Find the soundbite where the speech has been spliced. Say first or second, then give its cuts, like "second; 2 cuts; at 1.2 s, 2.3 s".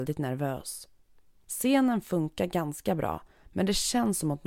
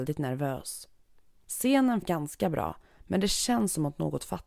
second; 1 cut; at 2.0 s